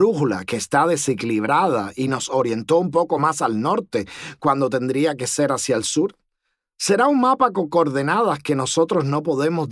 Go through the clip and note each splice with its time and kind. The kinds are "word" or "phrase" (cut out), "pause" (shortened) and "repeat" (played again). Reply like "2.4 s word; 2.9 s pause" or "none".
none